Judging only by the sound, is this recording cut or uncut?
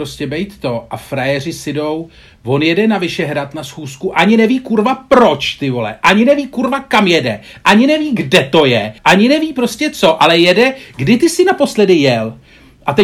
cut